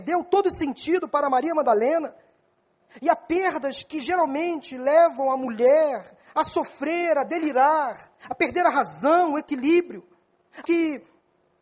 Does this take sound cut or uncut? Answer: cut